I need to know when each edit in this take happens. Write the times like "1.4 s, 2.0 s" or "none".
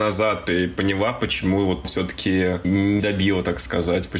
1.8 s, 2.6 s, 3.0 s